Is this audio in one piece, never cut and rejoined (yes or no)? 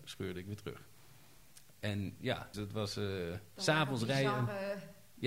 no